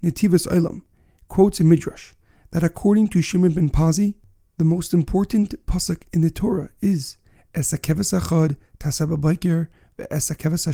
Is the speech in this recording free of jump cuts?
yes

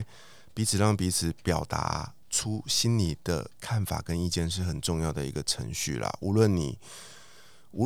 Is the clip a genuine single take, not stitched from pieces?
no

